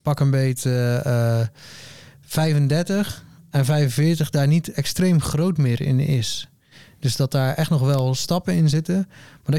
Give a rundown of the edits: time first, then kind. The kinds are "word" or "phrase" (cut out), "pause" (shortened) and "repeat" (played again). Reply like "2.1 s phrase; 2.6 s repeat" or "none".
none